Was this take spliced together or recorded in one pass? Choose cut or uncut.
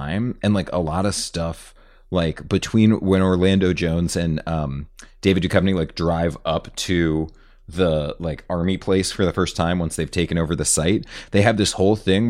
uncut